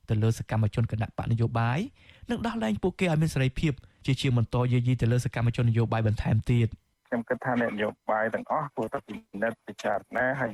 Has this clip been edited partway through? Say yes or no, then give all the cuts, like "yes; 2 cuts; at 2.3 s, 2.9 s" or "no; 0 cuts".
no; 0 cuts